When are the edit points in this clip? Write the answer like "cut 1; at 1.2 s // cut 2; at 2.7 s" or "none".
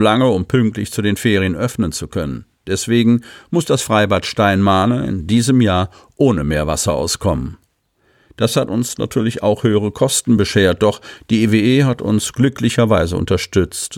none

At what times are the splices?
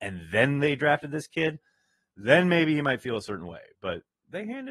none

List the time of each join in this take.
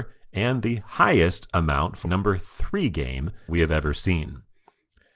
cut 1; at 2.1 s // cut 2; at 3.5 s

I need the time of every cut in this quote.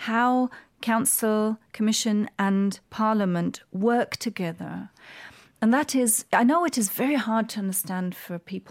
cut 1; at 2.8 s

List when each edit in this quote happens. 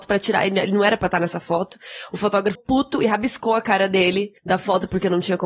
cut 1; at 2.5 s // cut 2; at 4.4 s

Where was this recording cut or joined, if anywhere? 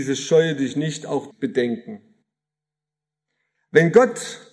cut 1; at 1.3 s

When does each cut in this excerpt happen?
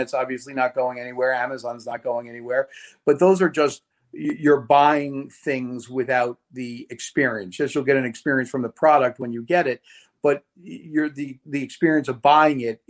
none

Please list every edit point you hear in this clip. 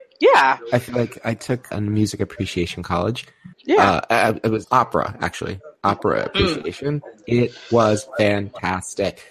cut 1; at 1.7 s // cut 2; at 2.8 s // cut 3; at 3.5 s // cut 4; at 4.6 s

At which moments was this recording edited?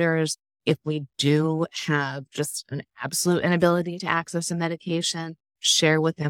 none

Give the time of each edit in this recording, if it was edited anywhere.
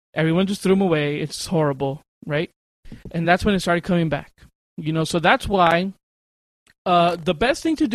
none

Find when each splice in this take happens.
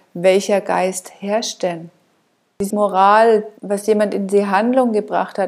cut 1; at 2.7 s // cut 2; at 3.6 s

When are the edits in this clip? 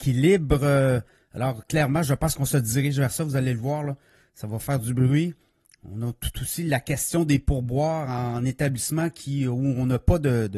none

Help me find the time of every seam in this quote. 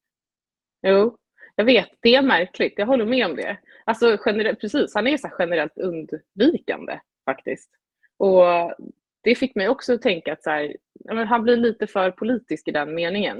none

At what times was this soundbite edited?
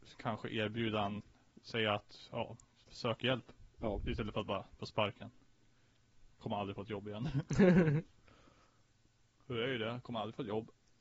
cut 1; at 4.8 s

